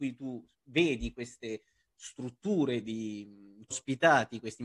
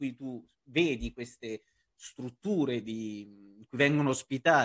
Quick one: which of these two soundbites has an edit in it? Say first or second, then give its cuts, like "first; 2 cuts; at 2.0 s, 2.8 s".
first; 1 cut; at 3.7 s